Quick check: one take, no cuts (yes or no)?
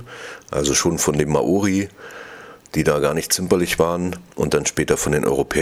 yes